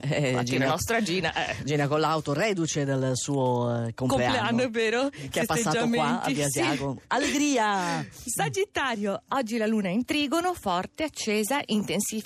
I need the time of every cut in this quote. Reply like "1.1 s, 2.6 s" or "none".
none